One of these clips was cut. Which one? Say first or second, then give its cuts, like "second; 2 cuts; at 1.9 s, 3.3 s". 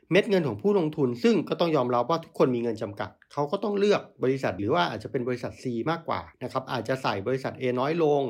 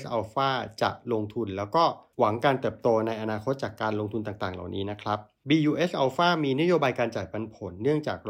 first; 2 cuts; at 4.6 s, 6.3 s